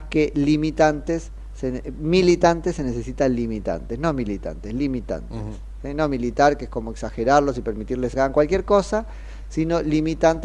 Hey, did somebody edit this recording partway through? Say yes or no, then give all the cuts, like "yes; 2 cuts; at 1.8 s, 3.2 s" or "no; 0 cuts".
yes; 1 cut; at 8.1 s